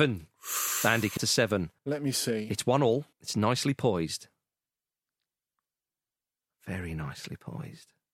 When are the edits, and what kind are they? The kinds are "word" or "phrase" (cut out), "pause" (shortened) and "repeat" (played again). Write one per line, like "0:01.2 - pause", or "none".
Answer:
0:01.2 - phrase
0:01.8 - pause
0:03.1 - pause